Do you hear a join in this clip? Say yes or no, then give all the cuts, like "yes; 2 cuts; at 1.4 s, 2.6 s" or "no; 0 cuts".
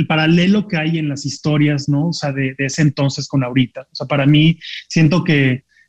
no; 0 cuts